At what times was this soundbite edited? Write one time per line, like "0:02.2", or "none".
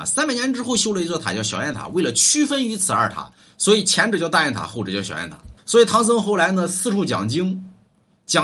0:05.6

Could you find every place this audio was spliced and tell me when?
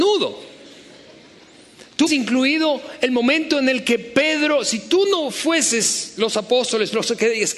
0:02.1

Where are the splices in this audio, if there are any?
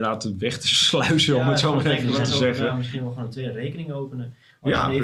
none

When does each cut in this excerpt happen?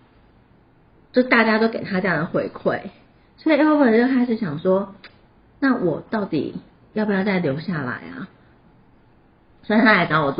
none

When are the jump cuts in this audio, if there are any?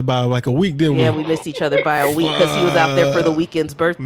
none

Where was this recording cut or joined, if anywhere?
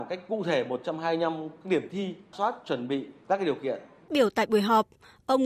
0:02.3
0:04.1

